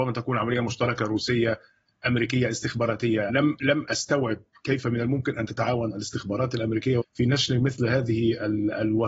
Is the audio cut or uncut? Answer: cut